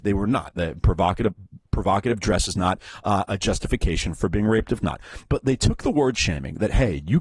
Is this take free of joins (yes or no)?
no